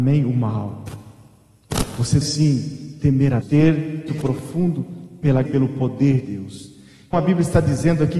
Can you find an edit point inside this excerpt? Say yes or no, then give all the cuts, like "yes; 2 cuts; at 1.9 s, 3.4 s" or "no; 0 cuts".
yes; 6 cuts; at 2.2 s, 3.4 s, 4.1 s, 5.4 s, 6.2 s, 7.1 s